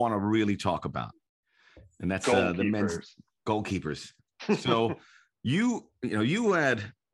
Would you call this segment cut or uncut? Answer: uncut